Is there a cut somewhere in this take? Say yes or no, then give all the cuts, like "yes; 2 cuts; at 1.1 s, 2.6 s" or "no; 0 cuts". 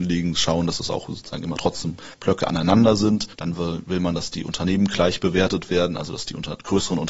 yes; 2 cuts; at 2.1 s, 3.3 s